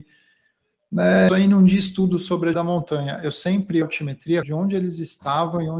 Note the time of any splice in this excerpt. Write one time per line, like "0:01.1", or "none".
0:01.3
0:02.5
0:03.8
0:04.4